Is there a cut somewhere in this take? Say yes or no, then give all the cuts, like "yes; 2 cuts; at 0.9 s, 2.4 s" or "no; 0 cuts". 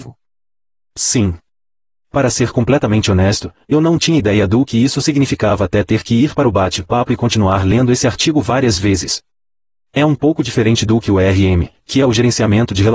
no; 0 cuts